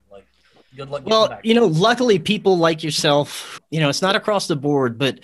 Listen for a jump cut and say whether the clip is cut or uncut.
cut